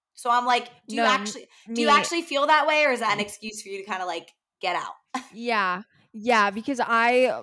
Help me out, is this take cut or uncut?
uncut